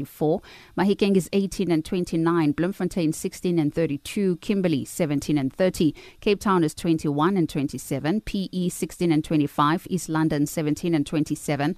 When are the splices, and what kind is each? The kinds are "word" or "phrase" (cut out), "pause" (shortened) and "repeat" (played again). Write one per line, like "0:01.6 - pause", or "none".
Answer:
none